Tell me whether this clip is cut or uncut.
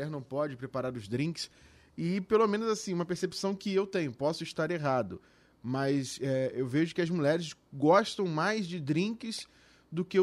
uncut